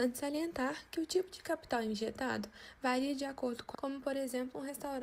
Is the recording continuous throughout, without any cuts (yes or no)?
no